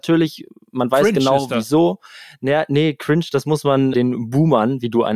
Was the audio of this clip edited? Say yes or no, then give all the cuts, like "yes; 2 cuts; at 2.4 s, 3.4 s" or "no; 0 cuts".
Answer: yes; 1 cut; at 3.9 s